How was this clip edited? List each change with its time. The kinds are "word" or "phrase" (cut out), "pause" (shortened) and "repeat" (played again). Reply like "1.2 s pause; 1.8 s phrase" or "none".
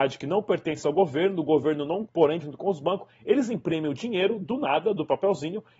2.1 s word; 2.4 s word